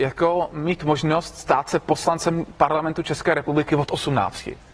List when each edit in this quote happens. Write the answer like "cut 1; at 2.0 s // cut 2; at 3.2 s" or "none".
none